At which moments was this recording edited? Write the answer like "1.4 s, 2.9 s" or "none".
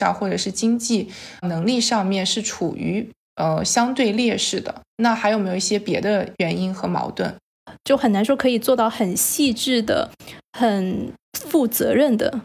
1.4 s, 4.9 s, 11.2 s